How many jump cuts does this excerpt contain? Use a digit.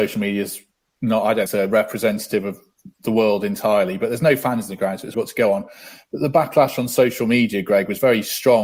2